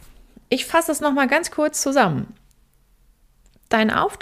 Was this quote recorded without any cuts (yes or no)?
yes